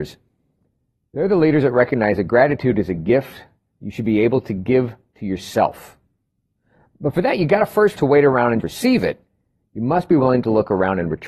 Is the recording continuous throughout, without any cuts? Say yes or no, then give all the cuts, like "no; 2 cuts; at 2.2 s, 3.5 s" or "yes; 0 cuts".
no; 2 cuts; at 8.0 s, 8.6 s